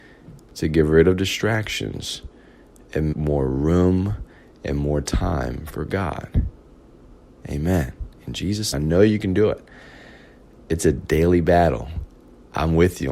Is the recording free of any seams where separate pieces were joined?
no; 2 cuts; at 3.1 s, 8.7 s

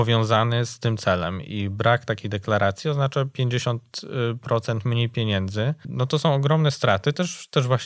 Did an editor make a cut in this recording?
no; 0 cuts

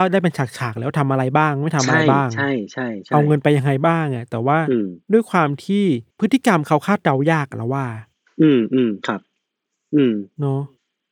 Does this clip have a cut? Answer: yes; 2 cuts; at 5.0 s, 6.1 s

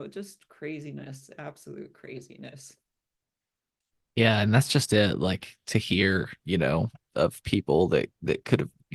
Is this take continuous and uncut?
yes; 0 cuts

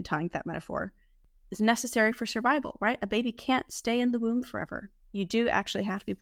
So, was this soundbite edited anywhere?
no; 0 cuts

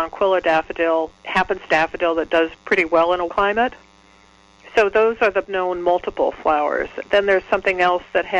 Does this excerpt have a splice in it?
yes; 5 cuts; at 1.1 s, 1.7 s, 2.6 s, 3.3 s, 5.4 s

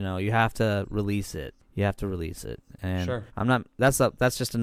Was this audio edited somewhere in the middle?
yes; 3 cuts; at 1.6 s, 3.3 s, 3.7 s

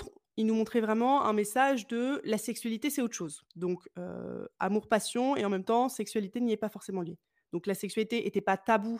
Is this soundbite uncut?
no; 1 cut; at 3.5 s

